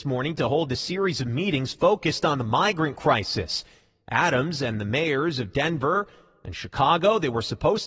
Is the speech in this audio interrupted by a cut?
no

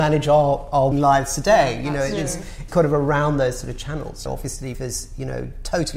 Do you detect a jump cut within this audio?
yes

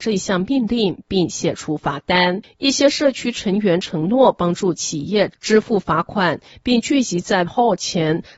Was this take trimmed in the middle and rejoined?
yes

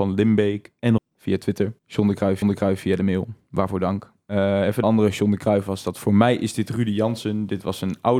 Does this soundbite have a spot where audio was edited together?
yes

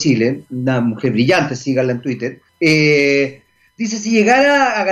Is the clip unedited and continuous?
no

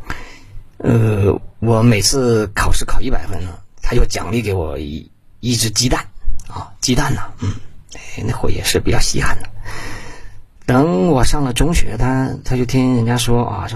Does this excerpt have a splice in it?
no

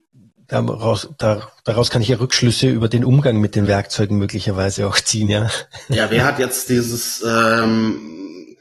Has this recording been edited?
no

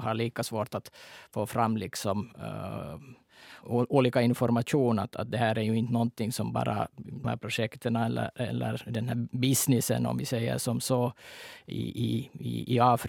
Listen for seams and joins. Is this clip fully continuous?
no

